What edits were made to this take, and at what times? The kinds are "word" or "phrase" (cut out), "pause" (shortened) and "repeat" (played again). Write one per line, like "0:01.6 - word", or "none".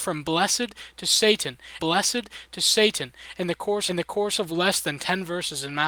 0:01.8 - repeat
0:03.9 - repeat